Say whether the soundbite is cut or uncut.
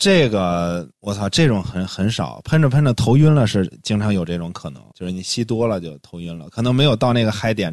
cut